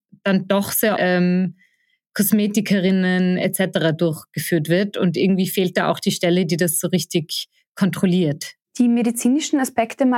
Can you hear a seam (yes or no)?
yes